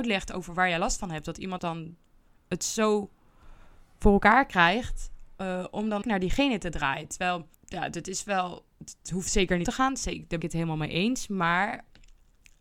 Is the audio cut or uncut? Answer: cut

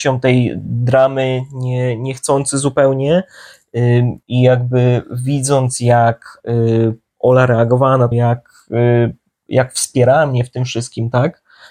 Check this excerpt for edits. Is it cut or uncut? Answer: cut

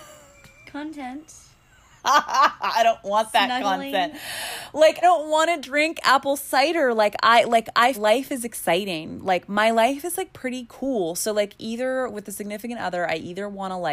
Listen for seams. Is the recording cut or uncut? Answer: cut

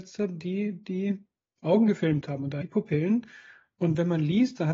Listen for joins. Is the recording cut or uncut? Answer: cut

